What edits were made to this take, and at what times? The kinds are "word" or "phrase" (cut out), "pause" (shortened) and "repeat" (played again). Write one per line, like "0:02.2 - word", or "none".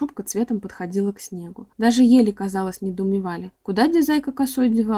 0:01.7 - pause
0:03.6 - pause

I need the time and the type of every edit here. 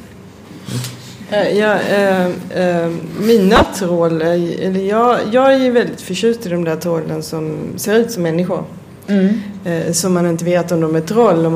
none

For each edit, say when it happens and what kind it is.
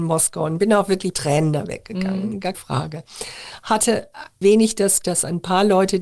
0:01.1 - word
0:02.5 - word
0:04.4 - word
0:05.0 - word

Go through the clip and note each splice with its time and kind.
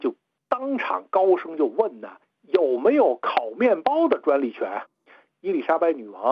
0:02.2 - pause
0:04.9 - pause

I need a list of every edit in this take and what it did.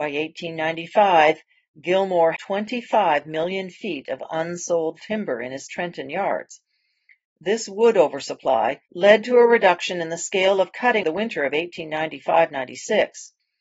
0:02.4 - word
0:08.9 - pause
0:11.0 - word

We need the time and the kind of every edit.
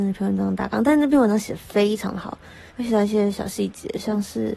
0:02.7 - pause

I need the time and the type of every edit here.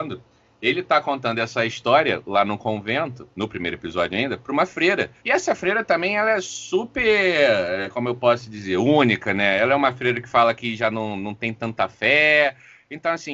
0:03.3 - pause
0:05.2 - pause

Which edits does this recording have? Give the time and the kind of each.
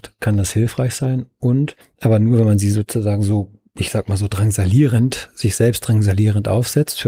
0:01.8 - pause

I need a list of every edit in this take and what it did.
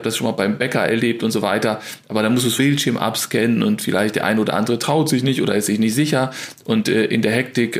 0:02.6 - word

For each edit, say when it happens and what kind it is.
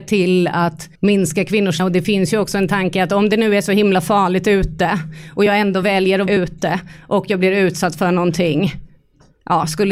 0:01.0 - pause
0:01.8 - word
0:06.3 - word

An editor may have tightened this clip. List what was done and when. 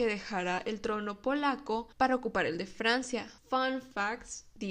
0:01.9 - pause
0:03.4 - pause

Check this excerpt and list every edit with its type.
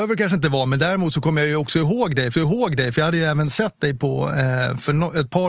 0:02.3 - repeat

